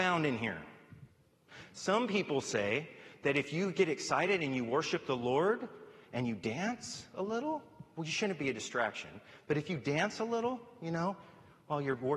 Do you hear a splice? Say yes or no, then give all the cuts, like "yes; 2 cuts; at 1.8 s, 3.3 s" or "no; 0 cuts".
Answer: no; 0 cuts